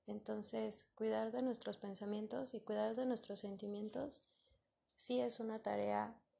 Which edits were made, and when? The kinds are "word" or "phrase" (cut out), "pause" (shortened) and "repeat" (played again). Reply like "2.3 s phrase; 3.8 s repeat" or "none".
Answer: none